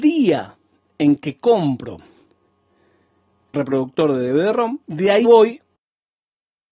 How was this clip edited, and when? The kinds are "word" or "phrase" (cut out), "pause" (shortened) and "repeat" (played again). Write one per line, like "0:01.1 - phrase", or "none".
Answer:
0:03.5 - word
0:04.8 - pause
0:05.2 - word